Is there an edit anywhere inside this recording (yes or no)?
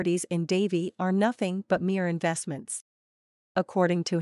no